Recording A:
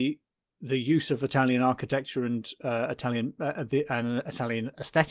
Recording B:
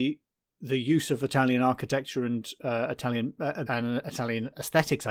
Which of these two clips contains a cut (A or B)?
B